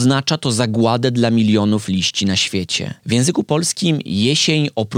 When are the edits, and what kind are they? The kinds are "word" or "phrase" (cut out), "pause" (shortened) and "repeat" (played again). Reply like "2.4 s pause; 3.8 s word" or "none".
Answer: none

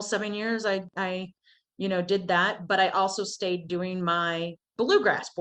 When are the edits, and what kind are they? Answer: none

